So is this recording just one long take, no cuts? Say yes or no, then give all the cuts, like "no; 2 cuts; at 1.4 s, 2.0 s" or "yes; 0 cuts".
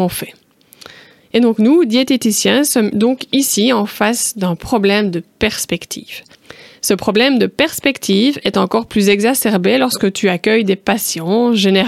yes; 0 cuts